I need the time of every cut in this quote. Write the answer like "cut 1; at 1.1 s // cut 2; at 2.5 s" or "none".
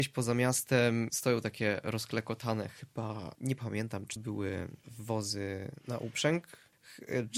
cut 1; at 1.1 s // cut 2; at 4.2 s